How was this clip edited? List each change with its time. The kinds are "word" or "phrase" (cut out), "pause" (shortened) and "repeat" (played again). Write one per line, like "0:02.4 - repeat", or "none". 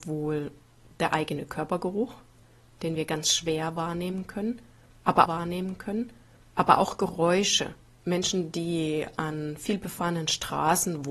0:05.3 - repeat